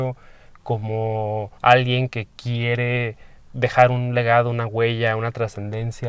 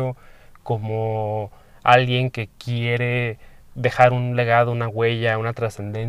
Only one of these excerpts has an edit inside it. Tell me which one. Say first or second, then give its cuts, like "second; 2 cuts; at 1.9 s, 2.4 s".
first; 1 cut; at 1.6 s